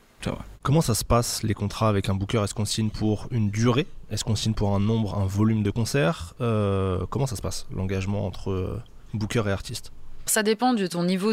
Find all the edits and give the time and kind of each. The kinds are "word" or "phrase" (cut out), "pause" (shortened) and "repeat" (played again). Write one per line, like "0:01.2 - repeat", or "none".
0:10.3 - word